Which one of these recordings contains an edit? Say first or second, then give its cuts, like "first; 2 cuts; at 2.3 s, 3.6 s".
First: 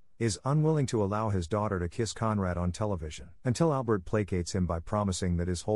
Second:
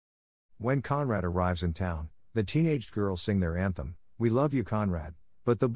first; 1 cut; at 3.4 s